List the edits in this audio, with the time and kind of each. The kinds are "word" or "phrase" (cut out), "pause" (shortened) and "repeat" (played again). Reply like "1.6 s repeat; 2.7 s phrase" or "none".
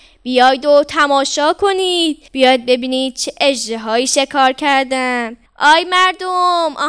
2.3 s pause; 5.5 s pause